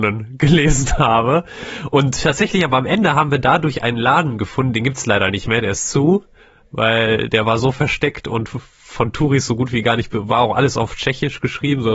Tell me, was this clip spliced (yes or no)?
no